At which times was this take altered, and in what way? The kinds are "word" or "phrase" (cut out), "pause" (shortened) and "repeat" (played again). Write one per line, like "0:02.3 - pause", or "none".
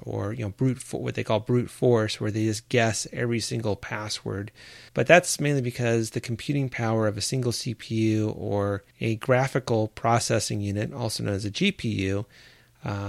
0:04.9 - pause
0:08.9 - pause